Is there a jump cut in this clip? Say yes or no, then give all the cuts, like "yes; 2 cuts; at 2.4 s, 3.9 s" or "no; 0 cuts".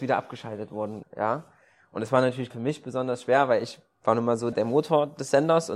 yes; 3 cuts; at 1.0 s, 2.5 s, 4.5 s